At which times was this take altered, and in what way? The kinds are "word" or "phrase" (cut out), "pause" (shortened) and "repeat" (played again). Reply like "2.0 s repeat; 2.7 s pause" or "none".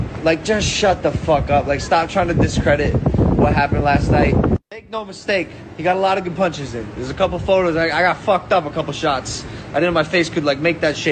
4.6 s pause

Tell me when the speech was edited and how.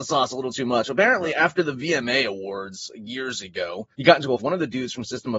3.9 s pause; 4.4 s phrase

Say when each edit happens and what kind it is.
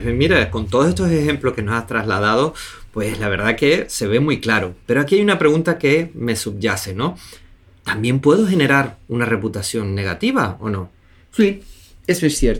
none

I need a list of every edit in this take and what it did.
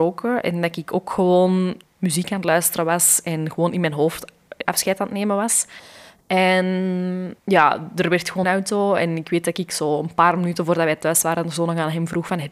1.8 s word; 4.7 s word; 7.4 s pause; 8.4 s phrase

